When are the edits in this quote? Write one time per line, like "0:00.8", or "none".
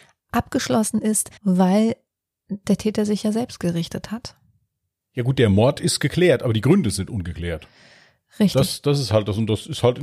0:01.4